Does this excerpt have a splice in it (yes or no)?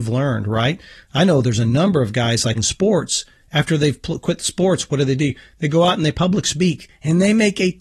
yes